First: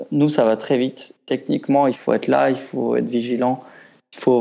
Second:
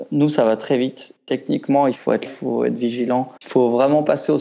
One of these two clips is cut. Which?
second; 2 cuts; at 2.3 s, 3.4 s

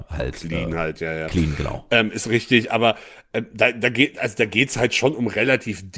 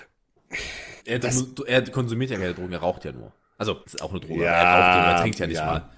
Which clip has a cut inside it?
second; 2 cuts; at 1.0 s, 3.8 s

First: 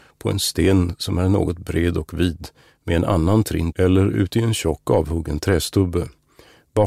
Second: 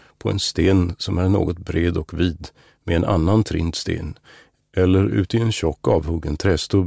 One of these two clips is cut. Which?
first; 1 cut; at 3.7 s

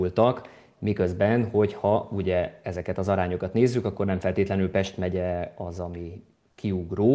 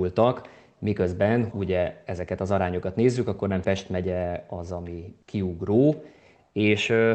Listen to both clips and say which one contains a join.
second; 3 cuts; at 1.5 s, 3.6 s, 5.2 s

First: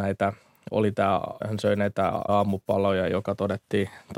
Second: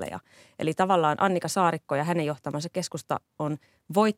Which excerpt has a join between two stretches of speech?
first; 2 cuts; at 1.4 s, 2.3 s

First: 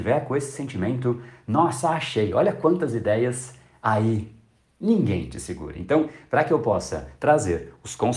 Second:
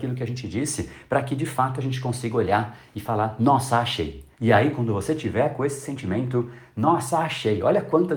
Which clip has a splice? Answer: second; 1 cut; at 4.3 s

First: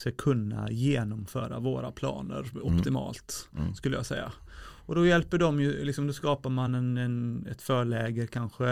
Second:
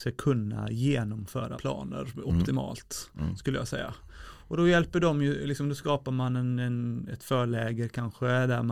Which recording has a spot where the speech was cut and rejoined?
second; 1 cut; at 1.5 s

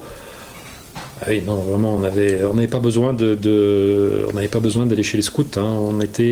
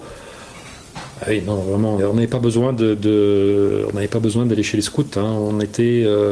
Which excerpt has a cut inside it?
second; 1 cut; at 2.0 s

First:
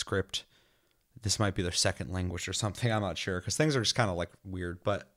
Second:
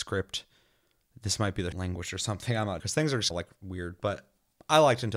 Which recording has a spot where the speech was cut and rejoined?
second; 3 cuts; at 1.7 s, 2.8 s, 3.3 s

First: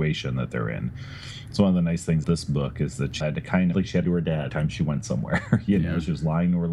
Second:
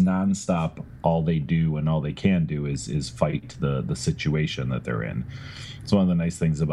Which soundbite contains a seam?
first; 5 cuts; at 2.2 s, 3.2 s, 3.7 s, 4.0 s, 4.5 s

